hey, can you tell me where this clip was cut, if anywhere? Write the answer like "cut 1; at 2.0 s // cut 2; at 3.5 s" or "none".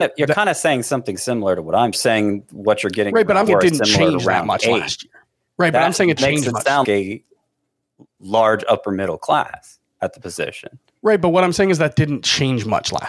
cut 1; at 1.9 s // cut 2; at 3.5 s // cut 3; at 6.2 s // cut 4; at 6.8 s